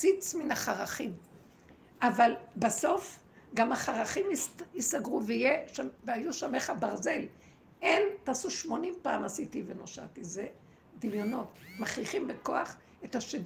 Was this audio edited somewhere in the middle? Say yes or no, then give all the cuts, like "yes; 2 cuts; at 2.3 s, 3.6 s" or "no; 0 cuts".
no; 0 cuts